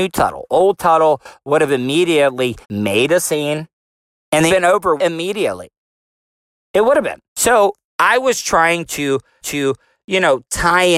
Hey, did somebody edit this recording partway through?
yes; 5 cuts; at 2.6 s, 4.5 s, 5.0 s, 7.3 s, 9.4 s

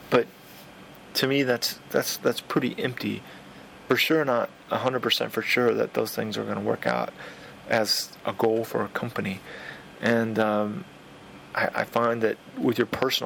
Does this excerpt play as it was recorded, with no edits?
no; 1 cut; at 3.9 s

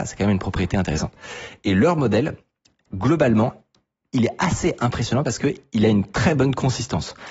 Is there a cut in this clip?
no; 0 cuts

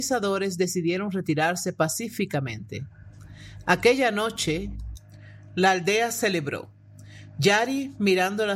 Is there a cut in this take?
no; 0 cuts

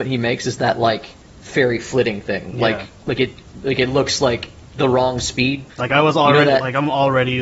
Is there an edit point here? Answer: yes; 1 cut; at 5.7 s

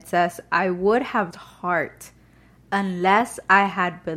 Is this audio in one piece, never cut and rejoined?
no; 1 cut; at 1.3 s

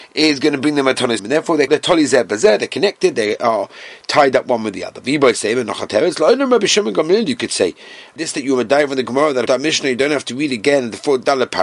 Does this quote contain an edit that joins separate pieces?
yes; 4 cuts; at 1.2 s, 1.7 s, 8.2 s, 9.5 s

